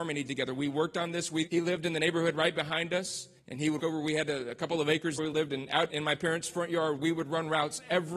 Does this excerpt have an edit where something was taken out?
yes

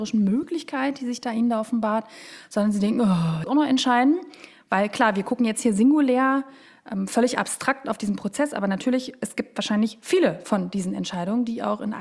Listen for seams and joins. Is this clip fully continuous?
no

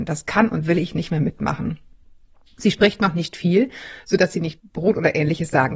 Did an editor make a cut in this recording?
no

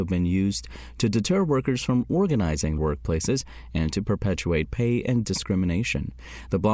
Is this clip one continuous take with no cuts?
no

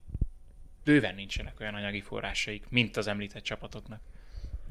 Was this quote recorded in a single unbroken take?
yes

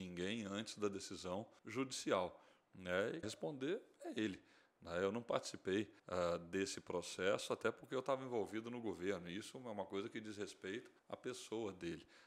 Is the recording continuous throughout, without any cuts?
no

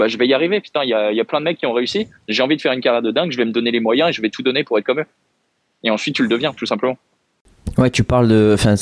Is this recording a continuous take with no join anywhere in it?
yes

